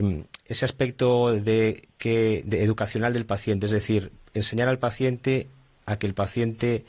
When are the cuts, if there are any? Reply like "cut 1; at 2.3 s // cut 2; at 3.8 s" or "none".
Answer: none